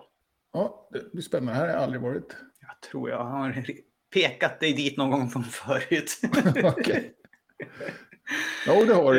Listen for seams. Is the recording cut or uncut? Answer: cut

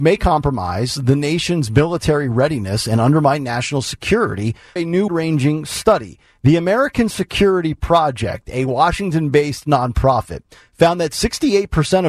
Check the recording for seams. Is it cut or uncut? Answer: cut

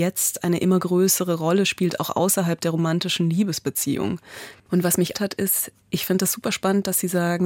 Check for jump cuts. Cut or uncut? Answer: cut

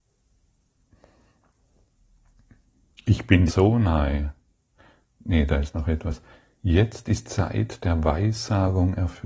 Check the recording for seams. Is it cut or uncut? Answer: cut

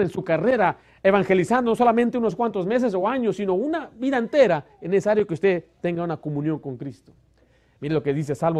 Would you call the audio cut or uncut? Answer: uncut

